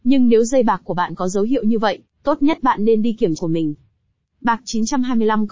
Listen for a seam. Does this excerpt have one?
yes; 1 cut; at 3.4 s

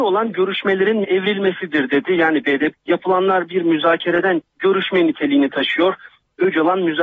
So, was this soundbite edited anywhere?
yes; 3 cuts; at 1.0 s, 2.7 s, 4.4 s

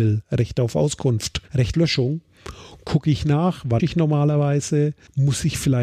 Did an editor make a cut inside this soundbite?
yes; 2 cuts; at 1.7 s, 3.8 s

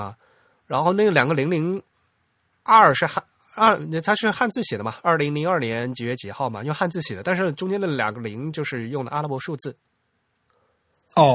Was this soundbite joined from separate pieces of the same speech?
no; 0 cuts

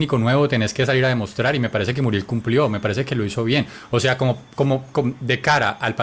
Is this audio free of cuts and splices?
yes; 0 cuts

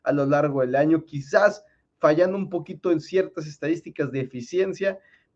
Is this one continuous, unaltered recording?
yes; 0 cuts

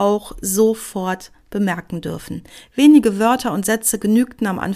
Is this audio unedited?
yes; 0 cuts

